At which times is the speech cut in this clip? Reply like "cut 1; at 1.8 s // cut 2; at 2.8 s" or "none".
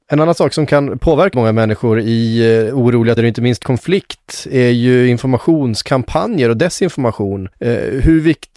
cut 1; at 1.3 s // cut 2; at 3.2 s // cut 3; at 3.6 s // cut 4; at 7.5 s